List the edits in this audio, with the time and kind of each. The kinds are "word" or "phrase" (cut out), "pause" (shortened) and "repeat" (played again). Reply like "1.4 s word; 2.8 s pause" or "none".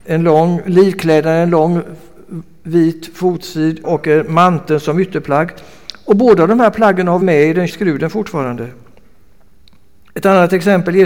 3.8 s word; 7.2 s word; 7.7 s word